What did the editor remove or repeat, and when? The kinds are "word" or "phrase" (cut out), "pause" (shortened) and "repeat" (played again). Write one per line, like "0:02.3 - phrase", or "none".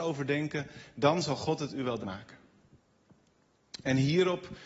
0:02.0 - word